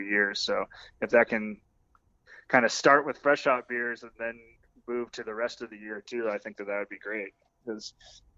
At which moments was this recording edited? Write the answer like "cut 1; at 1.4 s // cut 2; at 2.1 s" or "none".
none